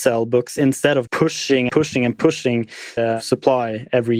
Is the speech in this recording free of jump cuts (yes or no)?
no